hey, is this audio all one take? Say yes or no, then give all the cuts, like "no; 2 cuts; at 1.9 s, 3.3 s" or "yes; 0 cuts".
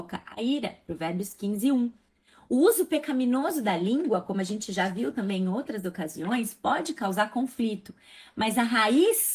yes; 0 cuts